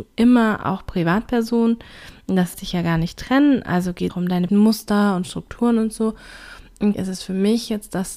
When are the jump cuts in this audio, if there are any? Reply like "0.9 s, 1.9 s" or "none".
2.5 s, 4.1 s, 4.5 s, 6.9 s

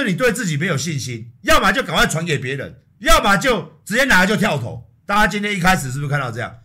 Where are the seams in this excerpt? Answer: 2.9 s

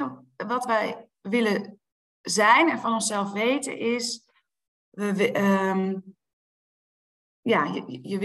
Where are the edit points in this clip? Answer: none

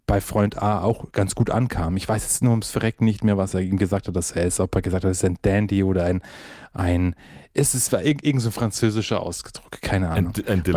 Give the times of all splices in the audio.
none

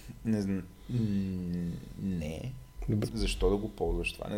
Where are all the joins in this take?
3.1 s

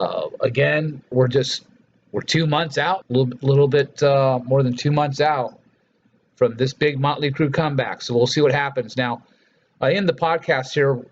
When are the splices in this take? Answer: 1.1 s, 3.0 s

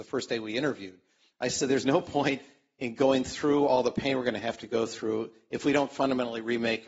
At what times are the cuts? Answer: none

